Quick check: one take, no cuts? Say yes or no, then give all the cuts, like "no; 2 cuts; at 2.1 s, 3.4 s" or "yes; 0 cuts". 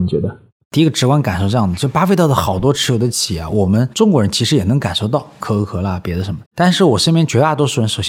no; 1 cut; at 6.5 s